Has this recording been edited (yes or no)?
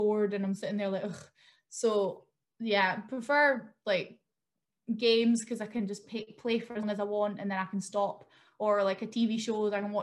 yes